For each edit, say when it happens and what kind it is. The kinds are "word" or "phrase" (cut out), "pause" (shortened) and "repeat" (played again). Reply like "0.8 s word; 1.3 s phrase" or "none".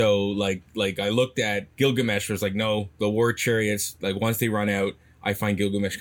1.7 s pause